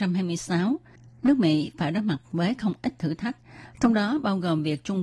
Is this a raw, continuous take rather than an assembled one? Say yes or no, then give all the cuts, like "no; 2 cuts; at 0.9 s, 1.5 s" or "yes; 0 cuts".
yes; 0 cuts